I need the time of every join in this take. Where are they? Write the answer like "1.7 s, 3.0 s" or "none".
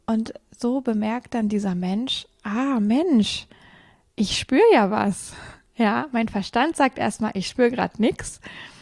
none